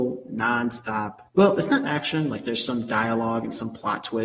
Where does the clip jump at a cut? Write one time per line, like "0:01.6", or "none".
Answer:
0:01.3
0:01.8